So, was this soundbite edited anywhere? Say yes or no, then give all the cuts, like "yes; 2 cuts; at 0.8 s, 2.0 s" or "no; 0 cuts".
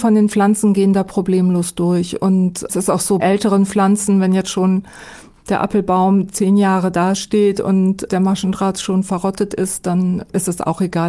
yes; 1 cut; at 3.2 s